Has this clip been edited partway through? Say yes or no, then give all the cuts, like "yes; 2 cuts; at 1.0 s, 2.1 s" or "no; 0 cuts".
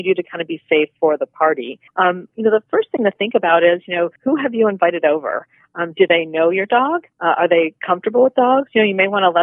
yes; 3 cuts; at 1.9 s, 4.2 s, 7.1 s